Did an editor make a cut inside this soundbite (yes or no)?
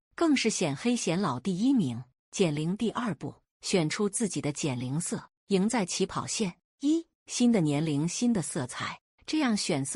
no